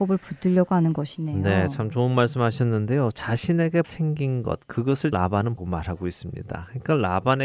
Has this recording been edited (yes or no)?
yes